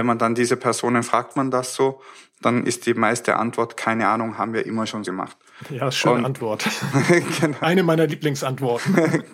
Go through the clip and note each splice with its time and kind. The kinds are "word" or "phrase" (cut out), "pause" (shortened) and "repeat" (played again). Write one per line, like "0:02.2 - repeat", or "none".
0:01.3 - phrase
0:05.0 - word

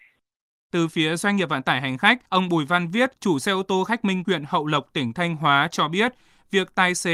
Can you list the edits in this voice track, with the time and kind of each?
0:02.3 - pause
0:03.1 - pause
0:04.2 - word

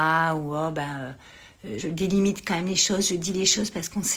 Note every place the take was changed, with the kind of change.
0:01.8 - word

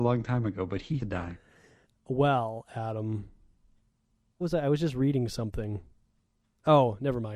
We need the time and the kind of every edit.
0:01.0 - phrase
0:04.4 - word
0:06.2 - pause

